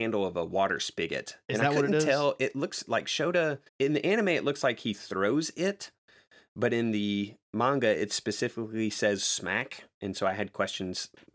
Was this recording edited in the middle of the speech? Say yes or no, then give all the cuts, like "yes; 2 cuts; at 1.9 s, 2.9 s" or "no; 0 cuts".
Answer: yes; 1 cut; at 3.7 s